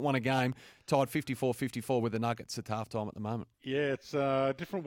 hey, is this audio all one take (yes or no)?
no